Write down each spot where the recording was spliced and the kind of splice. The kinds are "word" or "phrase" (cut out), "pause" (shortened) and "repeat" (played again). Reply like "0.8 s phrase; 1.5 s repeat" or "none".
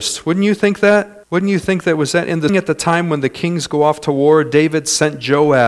1.2 s pause; 2.5 s word